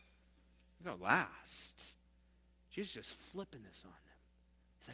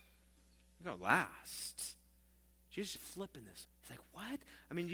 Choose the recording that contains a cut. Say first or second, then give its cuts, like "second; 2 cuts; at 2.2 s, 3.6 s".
second; 2 cuts; at 3.0 s, 3.6 s